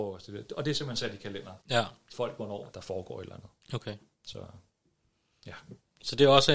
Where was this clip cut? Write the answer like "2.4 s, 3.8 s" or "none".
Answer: 1.6 s, 2.1 s, 2.7 s